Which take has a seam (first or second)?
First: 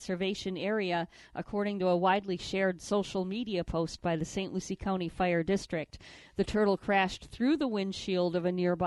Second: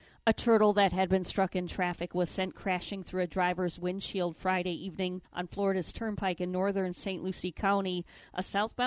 second